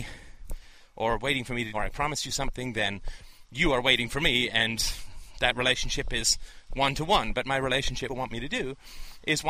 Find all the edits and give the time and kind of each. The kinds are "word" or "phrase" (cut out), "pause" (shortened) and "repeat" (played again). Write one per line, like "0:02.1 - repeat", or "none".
0:01.7 - phrase
0:08.1 - phrase